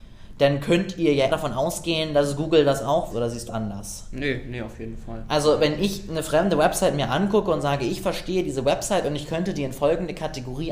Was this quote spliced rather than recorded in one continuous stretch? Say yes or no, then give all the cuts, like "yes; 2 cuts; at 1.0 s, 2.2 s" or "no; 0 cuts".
yes; 3 cuts; at 1.3 s, 3.1 s, 3.5 s